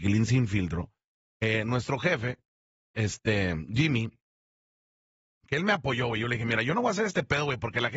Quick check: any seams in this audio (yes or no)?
no